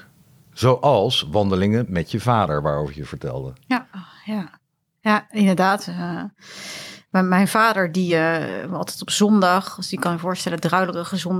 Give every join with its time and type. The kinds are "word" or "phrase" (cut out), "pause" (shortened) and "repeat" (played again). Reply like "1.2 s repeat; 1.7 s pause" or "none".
none